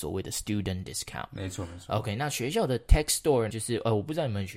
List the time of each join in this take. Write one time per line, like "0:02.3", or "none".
0:03.5